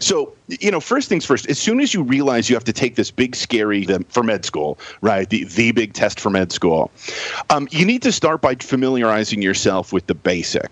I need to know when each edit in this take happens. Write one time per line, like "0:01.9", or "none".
0:03.8
0:08.6